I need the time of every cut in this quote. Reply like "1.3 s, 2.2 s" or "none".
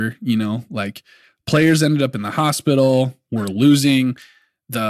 none